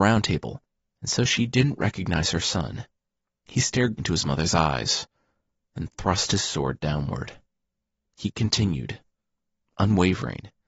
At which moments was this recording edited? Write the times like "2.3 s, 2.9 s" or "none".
4.0 s